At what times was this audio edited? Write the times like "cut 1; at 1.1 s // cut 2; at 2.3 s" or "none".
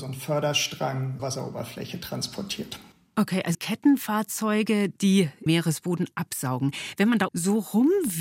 cut 1; at 1.2 s // cut 2; at 3.5 s // cut 3; at 5.5 s // cut 4; at 7.3 s